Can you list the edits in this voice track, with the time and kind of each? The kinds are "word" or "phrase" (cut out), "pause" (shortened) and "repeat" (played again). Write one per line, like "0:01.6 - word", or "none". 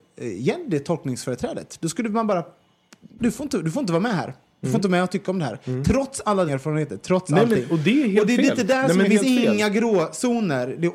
0:03.2 - word
0:06.5 - word
0:09.1 - word